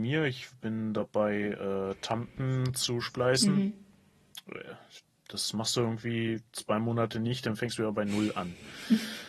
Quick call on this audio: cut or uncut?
uncut